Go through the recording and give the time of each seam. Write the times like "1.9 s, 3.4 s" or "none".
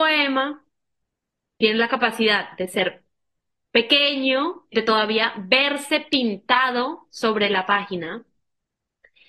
none